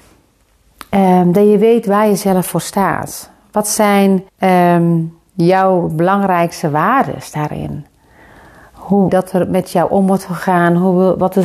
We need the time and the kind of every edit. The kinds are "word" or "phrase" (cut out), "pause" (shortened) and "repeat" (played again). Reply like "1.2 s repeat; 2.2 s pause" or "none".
4.3 s pause; 9.1 s phrase